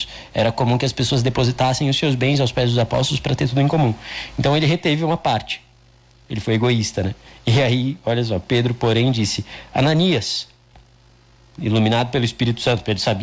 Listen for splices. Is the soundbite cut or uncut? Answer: uncut